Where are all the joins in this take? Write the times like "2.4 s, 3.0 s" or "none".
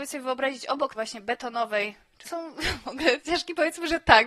0.9 s, 2.2 s, 3.2 s